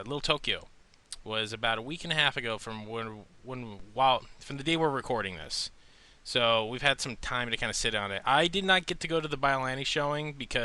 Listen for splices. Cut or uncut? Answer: uncut